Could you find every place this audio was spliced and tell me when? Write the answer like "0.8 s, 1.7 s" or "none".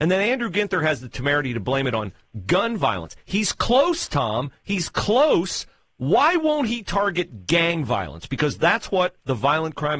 none